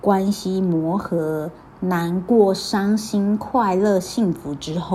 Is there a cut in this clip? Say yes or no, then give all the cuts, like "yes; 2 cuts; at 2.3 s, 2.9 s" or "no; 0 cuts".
no; 0 cuts